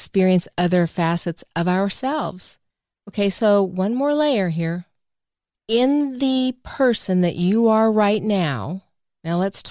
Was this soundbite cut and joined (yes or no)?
yes